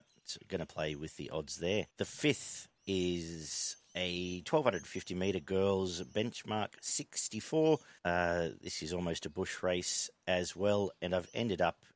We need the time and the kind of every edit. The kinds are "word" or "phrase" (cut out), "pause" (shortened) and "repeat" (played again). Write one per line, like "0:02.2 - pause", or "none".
0:01.9 - pause
0:08.0 - pause